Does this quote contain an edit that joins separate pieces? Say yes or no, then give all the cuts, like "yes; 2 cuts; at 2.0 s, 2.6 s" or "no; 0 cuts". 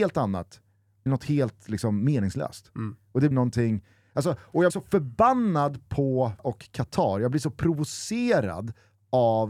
yes; 4 cuts; at 1.1 s, 3.3 s, 4.7 s, 6.4 s